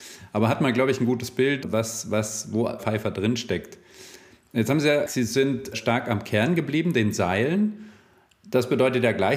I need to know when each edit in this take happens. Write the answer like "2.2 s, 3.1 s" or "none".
1.6 s, 2.8 s, 5.1 s, 5.7 s